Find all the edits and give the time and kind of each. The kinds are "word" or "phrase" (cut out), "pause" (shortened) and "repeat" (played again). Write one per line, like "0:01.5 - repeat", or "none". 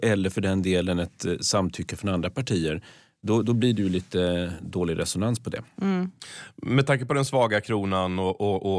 none